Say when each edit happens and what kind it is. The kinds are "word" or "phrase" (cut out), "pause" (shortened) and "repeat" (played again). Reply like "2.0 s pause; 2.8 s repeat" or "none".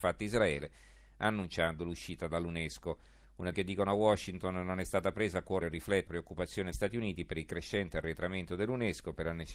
3.5 s word; 5.6 s word; 6.1 s word; 6.7 s word